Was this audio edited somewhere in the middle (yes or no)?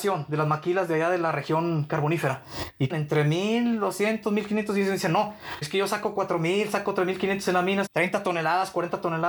yes